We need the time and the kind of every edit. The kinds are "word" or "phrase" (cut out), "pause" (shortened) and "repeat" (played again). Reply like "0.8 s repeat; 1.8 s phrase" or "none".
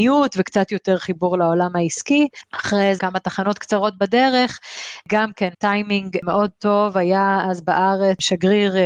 3.0 s word; 5.5 s pause